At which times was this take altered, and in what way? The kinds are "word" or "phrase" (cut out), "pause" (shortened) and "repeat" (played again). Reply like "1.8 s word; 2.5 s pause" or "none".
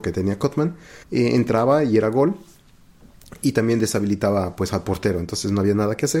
1.0 s pause